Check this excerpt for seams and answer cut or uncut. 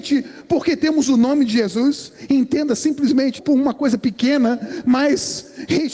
cut